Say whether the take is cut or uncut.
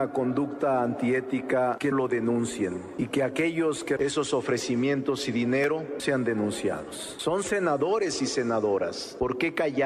cut